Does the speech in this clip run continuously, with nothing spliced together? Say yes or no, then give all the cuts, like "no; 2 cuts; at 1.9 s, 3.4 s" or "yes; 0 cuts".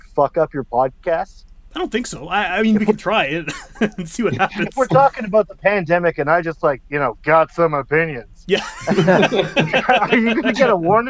yes; 0 cuts